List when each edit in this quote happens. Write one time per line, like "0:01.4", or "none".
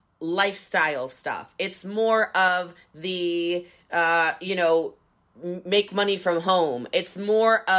none